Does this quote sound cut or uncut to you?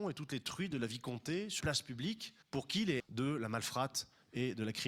cut